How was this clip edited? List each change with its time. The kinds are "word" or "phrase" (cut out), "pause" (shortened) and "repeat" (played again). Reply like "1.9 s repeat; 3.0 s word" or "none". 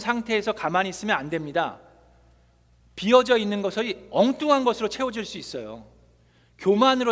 none